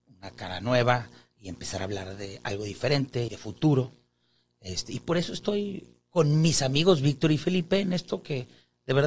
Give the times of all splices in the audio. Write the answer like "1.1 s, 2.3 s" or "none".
3.3 s